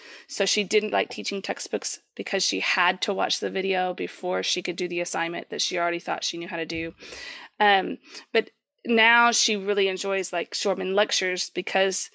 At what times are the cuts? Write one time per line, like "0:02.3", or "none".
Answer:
0:00.9

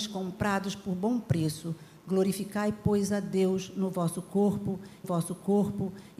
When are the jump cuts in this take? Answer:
0:05.0

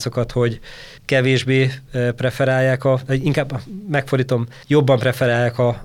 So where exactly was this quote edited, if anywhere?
0:01.0
0:04.6

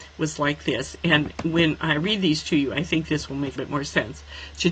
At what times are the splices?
0:03.6

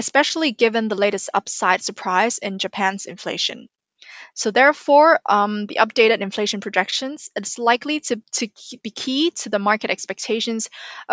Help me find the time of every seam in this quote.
0:08.2

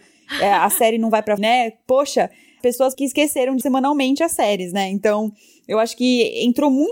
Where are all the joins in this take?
0:01.4
0:02.6
0:02.9
0:03.6

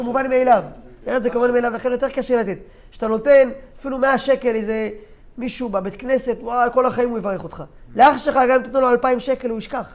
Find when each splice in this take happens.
none

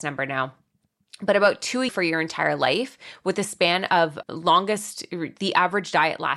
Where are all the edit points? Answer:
0:01.9
0:04.2

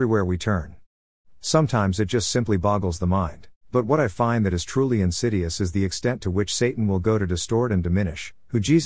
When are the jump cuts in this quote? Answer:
0:03.6

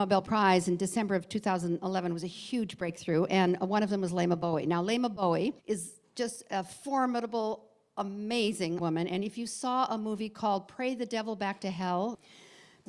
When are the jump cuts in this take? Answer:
0:05.6
0:08.8

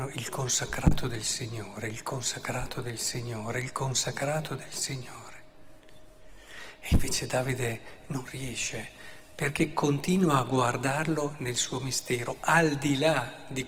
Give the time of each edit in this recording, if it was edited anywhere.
none

